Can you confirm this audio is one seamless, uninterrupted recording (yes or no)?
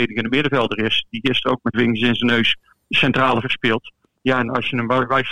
no